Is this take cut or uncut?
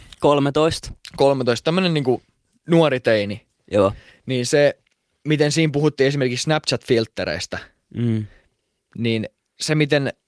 uncut